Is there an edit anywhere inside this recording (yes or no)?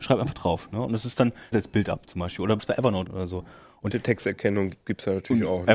yes